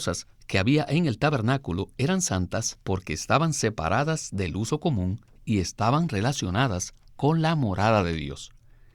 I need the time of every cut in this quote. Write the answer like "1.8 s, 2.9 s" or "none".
2.8 s